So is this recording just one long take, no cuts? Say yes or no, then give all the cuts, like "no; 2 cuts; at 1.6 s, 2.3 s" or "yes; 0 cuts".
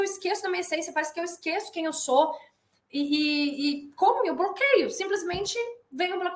yes; 0 cuts